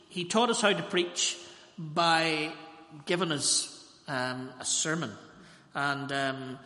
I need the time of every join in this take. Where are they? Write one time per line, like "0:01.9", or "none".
none